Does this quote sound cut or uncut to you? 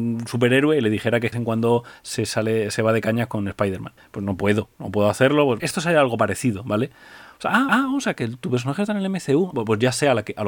cut